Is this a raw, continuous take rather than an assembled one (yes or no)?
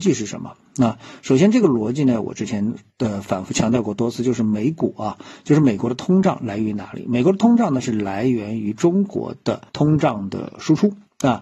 no